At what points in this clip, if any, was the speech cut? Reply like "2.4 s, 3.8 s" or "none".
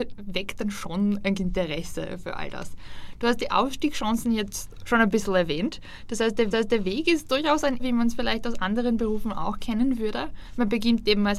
1.4 s, 6.5 s, 7.8 s